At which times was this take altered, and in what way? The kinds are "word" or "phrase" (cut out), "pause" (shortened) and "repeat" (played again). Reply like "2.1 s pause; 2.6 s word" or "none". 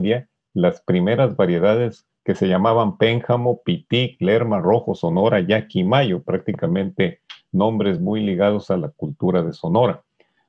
none